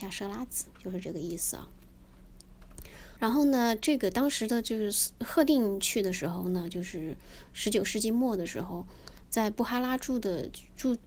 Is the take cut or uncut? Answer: cut